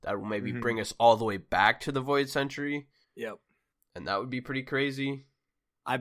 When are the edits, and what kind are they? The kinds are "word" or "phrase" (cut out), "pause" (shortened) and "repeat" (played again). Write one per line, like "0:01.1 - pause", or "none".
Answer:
0:03.0 - pause